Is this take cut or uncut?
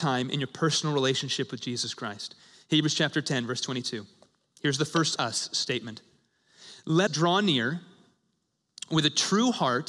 cut